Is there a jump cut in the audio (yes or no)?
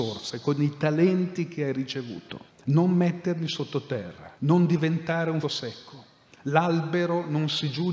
yes